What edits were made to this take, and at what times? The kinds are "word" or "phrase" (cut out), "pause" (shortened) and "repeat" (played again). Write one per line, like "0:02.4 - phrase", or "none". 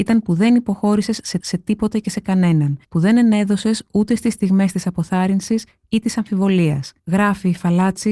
0:01.4 - repeat
0:02.8 - pause
0:07.0 - pause